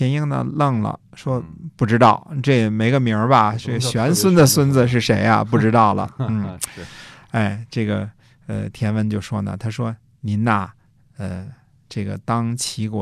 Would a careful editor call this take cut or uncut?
uncut